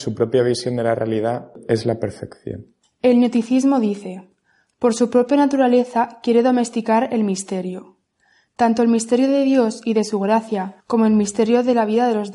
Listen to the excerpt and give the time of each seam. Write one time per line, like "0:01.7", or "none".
0:10.8